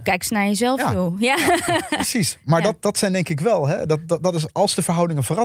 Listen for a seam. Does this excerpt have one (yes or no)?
no